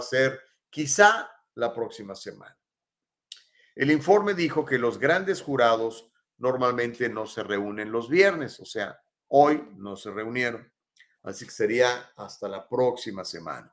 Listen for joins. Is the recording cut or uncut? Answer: uncut